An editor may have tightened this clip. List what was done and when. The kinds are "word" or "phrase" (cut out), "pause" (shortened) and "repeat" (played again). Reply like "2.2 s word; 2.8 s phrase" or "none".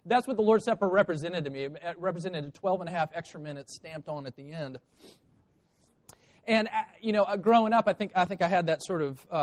none